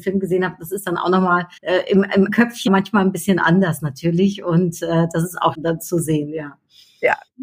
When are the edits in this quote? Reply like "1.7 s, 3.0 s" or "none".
1.6 s, 2.3 s, 2.7 s, 5.5 s